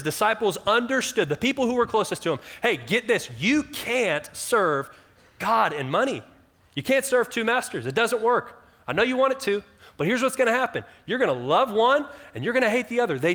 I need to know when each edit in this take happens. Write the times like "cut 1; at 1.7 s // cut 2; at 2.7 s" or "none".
none